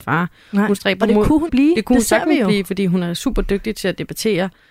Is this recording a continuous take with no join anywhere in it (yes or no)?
no